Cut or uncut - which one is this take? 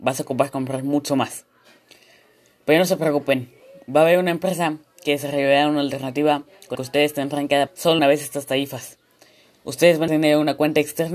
cut